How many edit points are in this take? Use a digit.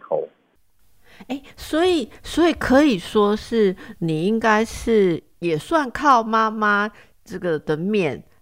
0